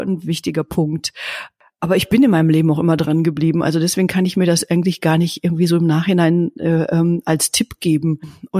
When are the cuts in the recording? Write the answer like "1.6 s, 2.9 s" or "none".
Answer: none